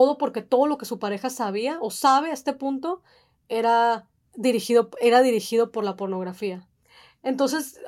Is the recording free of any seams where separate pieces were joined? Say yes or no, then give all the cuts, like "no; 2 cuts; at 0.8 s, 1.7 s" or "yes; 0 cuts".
no; 1 cut; at 4.2 s